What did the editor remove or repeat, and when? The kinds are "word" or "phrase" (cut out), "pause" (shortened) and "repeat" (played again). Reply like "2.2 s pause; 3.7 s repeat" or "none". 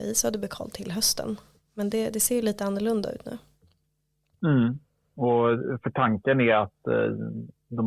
none